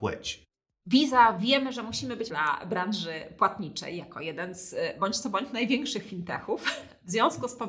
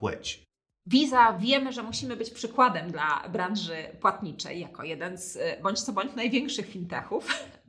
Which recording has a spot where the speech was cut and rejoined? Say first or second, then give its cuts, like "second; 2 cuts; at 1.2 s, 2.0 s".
first; 1 cut; at 2.3 s